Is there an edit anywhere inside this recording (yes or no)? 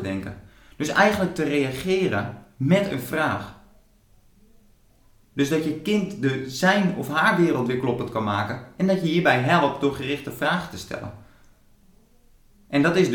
no